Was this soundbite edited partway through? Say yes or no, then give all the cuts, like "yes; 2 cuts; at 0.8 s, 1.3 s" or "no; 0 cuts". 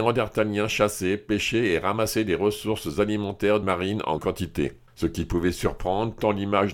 yes; 3 cuts; at 3.6 s, 4.2 s, 4.9 s